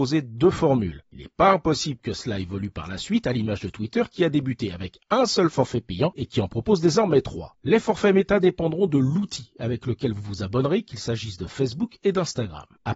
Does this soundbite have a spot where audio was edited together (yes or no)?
no